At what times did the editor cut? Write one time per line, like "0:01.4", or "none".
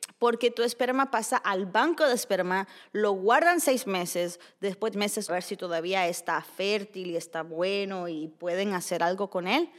0:04.9
0:05.3